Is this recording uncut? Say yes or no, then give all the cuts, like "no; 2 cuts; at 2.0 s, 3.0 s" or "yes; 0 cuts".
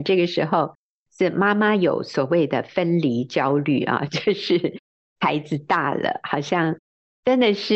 yes; 0 cuts